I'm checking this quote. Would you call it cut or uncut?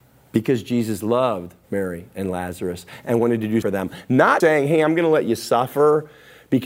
cut